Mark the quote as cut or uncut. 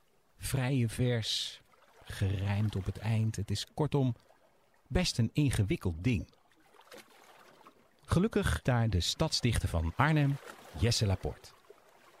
cut